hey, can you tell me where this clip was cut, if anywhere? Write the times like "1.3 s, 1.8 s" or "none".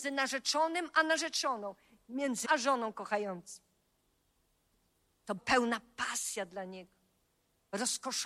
2.4 s, 5.4 s